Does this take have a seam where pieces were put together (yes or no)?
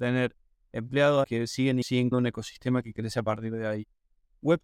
yes